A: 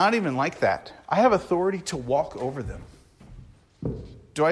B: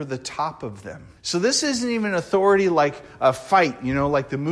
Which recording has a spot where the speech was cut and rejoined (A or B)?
B